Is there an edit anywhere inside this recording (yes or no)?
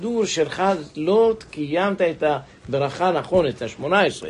no